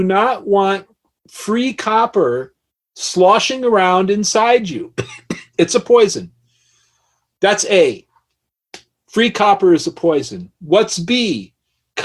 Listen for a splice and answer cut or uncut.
uncut